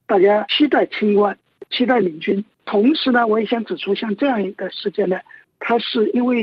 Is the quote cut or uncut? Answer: uncut